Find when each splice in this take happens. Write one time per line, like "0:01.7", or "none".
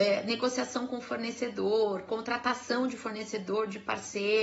none